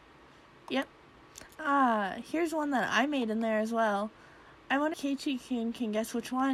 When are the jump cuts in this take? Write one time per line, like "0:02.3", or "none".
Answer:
0:04.9